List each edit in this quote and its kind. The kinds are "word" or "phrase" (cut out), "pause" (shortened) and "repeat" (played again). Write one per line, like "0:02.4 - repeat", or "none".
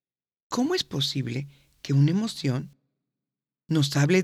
none